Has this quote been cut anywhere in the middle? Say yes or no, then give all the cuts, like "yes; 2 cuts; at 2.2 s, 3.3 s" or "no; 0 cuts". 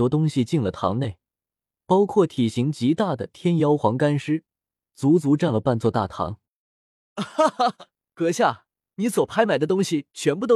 no; 0 cuts